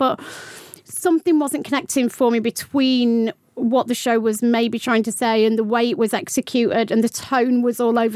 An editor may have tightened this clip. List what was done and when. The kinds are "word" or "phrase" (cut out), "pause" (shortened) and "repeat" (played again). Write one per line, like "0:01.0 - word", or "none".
none

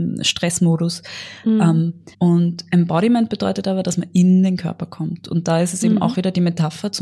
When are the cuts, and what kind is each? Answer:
0:02.1 - pause

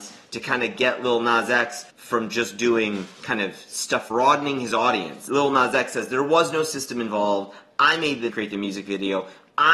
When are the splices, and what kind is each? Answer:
0:01.9 - pause
0:04.1 - phrase
0:08.3 - phrase

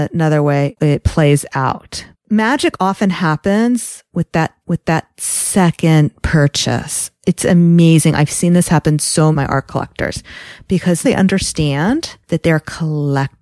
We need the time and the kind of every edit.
0:02.1 - pause
0:04.6 - repeat
0:09.3 - phrase
0:11.0 - word
0:12.2 - pause

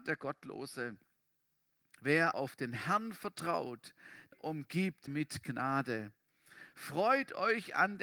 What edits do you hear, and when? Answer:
0:02.3 - word
0:04.3 - word
0:05.1 - word

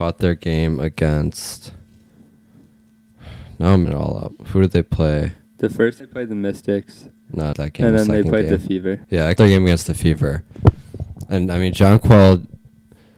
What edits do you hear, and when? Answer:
0:03.8 - word
0:06.0 - word
0:07.5 - word
0:09.0 - pause
0:09.4 - word

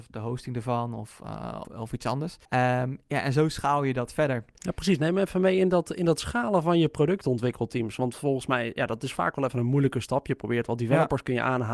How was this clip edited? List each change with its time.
0:01.6 - word
0:02.4 - pause

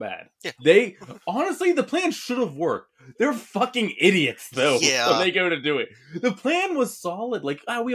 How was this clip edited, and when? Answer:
none

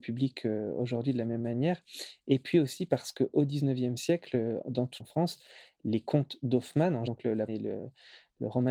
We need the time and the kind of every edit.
0:05.0 - phrase
0:07.1 - word
0:07.5 - phrase

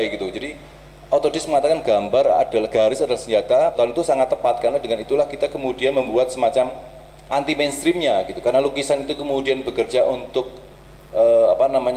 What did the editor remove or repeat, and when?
0:03.7 - word
0:07.3 - word

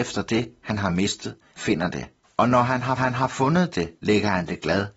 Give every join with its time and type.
0:01.6 - phrase
0:02.2 - pause
0:03.0 - repeat
0:04.0 - pause

